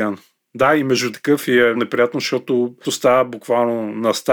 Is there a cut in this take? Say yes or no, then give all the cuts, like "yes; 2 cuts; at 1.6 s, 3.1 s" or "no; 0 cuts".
yes; 3 cuts; at 1.1 s, 1.7 s, 2.8 s